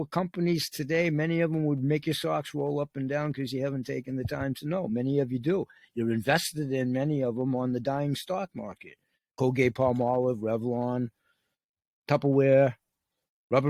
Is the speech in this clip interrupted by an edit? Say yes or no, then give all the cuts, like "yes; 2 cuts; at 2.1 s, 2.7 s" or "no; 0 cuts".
no; 0 cuts